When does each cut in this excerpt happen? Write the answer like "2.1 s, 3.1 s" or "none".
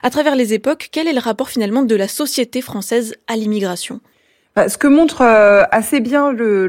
4.1 s